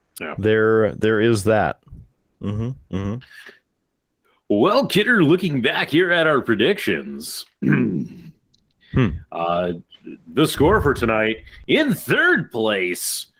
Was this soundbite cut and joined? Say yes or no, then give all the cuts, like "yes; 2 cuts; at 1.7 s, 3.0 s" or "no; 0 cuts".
no; 0 cuts